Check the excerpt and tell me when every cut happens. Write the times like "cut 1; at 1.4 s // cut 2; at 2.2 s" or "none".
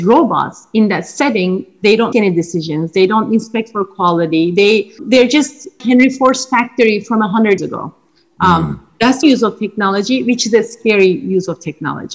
cut 1; at 2.1 s // cut 2; at 5.0 s // cut 3; at 5.8 s // cut 4; at 7.6 s // cut 5; at 9.2 s